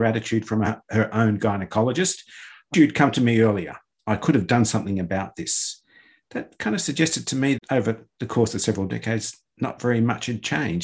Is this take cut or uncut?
cut